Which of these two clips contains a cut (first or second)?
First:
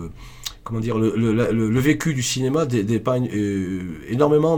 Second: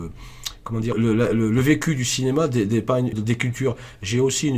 second